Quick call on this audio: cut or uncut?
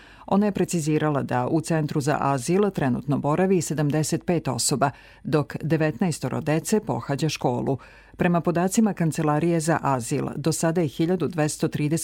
uncut